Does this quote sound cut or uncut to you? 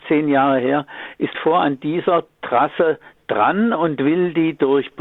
cut